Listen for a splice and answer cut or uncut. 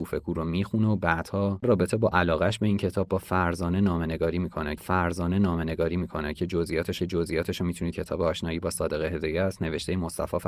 cut